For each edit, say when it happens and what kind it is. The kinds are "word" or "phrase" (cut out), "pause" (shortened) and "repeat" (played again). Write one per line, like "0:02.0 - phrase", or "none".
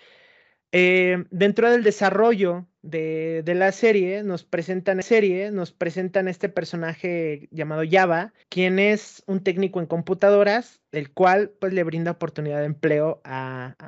0:05.0 - repeat
0:08.4 - pause
0:10.8 - pause